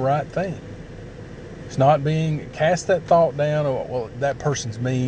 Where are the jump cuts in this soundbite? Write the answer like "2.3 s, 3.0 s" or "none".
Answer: none